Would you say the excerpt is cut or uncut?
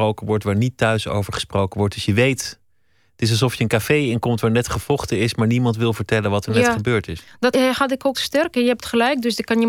cut